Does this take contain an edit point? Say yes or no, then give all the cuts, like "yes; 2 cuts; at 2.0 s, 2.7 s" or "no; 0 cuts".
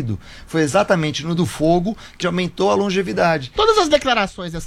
yes; 2 cuts; at 1.4 s, 2.2 s